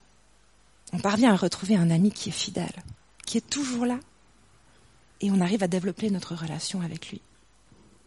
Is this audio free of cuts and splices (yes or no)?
yes